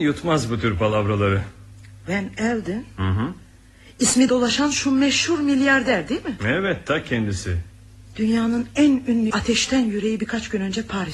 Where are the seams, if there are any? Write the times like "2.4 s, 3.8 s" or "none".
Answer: 4.3 s, 9.3 s